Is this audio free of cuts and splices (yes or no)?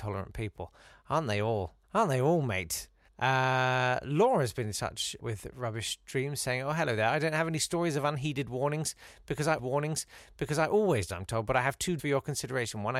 no